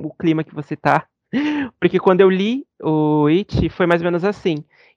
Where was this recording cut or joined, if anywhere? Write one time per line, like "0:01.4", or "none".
none